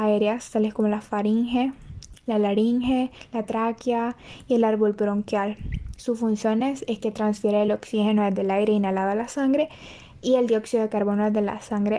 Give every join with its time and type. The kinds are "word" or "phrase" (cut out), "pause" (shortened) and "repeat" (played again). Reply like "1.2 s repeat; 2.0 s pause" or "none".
none